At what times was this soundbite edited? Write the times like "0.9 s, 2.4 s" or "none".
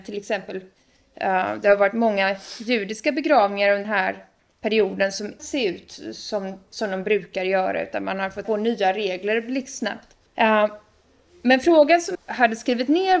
3.8 s, 4.4 s, 5.4 s, 8.4 s, 10.3 s, 12.1 s